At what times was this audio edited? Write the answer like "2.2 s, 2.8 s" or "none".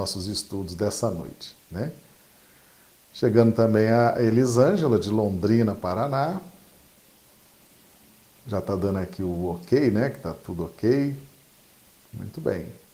none